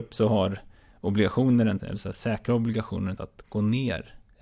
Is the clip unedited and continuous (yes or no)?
no